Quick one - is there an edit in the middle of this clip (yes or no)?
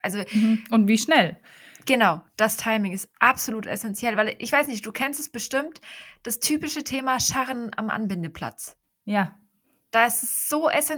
no